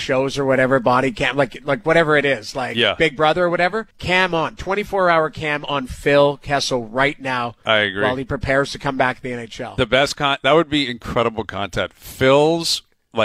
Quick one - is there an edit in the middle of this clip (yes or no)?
yes